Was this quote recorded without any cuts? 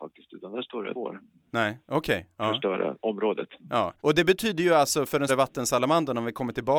no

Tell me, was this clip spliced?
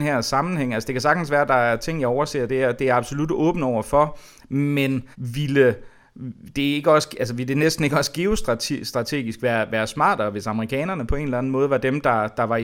yes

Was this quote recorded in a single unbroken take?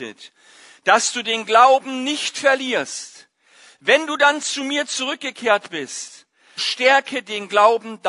no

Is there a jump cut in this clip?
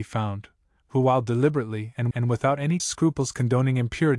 yes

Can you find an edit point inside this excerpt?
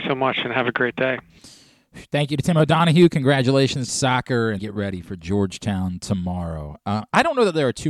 yes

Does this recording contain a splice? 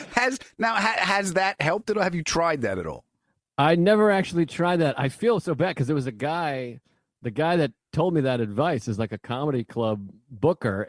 no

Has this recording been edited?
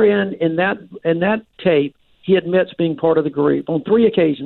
no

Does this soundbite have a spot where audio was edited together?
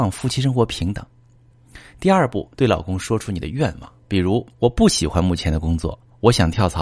yes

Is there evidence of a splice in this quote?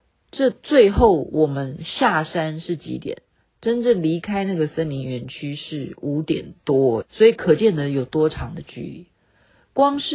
yes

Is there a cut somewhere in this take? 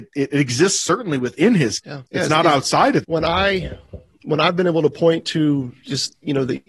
yes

